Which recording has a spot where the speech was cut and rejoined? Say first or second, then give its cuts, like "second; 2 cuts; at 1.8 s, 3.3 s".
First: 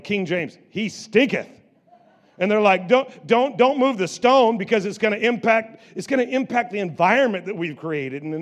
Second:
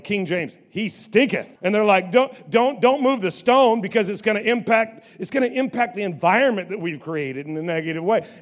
second; 1 cut; at 1.6 s